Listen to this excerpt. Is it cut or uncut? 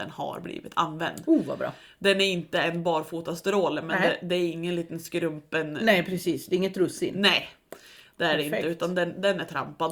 uncut